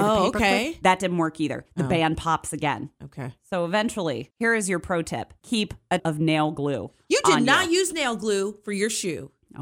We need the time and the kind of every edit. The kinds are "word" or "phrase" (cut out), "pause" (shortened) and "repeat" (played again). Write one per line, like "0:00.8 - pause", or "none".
0:05.4 - word
0:06.0 - word